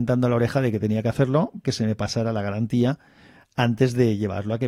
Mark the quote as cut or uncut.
cut